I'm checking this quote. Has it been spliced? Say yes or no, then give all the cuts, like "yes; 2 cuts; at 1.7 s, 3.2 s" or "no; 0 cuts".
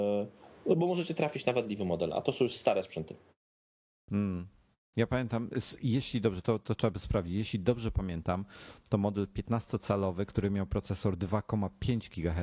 no; 0 cuts